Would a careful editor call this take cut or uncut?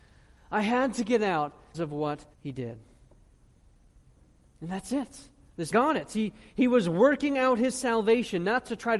cut